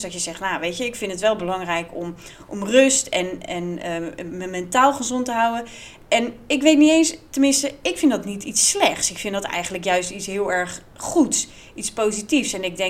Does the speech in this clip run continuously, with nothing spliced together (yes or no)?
yes